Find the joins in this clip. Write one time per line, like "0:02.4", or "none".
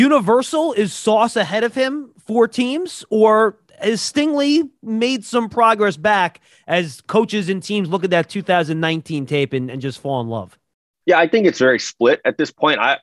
none